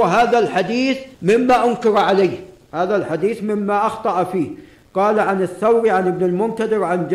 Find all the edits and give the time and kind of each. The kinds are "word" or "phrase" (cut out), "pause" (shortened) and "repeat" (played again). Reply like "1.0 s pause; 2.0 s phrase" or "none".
1.1 s pause